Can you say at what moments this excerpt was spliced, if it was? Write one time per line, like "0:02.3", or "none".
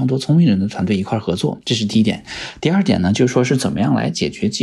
0:01.6